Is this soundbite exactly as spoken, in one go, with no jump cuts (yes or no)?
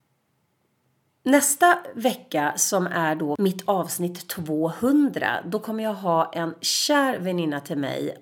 yes